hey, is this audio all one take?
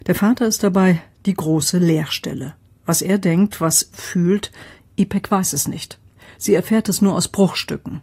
no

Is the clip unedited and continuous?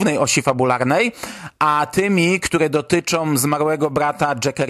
yes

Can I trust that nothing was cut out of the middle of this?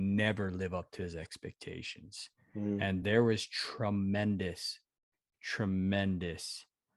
yes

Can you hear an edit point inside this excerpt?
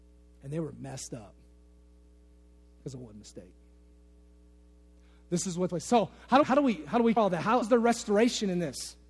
yes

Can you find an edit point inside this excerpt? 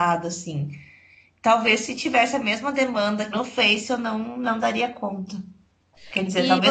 yes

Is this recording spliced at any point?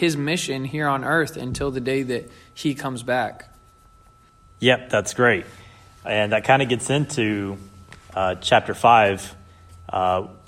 no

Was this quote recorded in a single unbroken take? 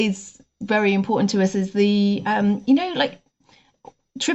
yes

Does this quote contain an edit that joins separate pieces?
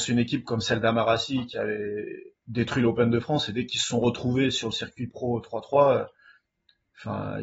no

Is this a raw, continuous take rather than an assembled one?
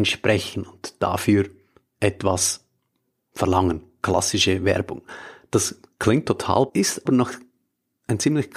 no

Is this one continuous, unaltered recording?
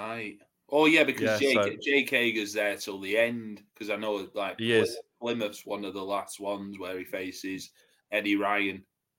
yes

